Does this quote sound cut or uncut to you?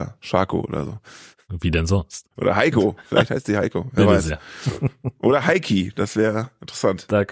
cut